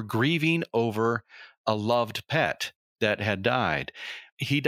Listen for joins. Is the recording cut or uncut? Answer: uncut